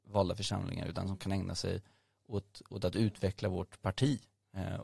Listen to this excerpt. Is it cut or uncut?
uncut